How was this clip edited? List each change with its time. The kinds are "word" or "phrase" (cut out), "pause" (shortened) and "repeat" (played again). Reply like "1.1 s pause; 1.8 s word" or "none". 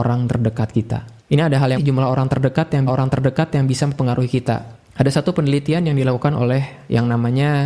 1.2 s pause; 1.8 s phrase; 2.9 s repeat

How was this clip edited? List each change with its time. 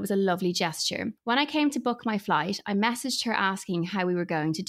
1.2 s pause

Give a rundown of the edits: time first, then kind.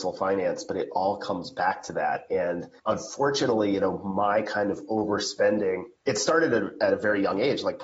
2.8 s pause; 6.0 s pause

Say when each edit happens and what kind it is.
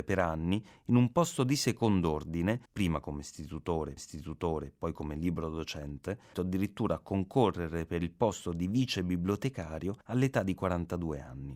2.7 s pause; 4.0 s repeat; 6.3 s word; 10.0 s pause

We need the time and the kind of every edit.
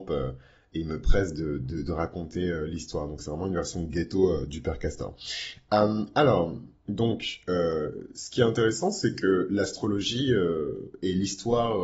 none

